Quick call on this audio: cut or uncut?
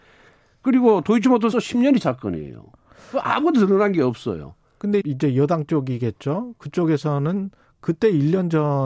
cut